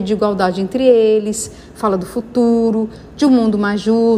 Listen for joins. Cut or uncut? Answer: uncut